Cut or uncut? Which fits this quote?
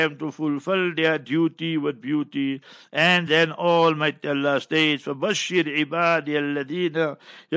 uncut